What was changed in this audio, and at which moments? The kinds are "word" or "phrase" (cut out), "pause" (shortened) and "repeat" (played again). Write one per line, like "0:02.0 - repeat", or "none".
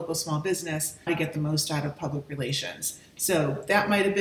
0:01.1 - word